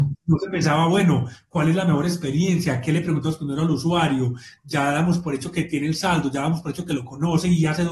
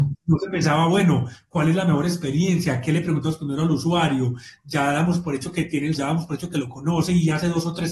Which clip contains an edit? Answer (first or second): second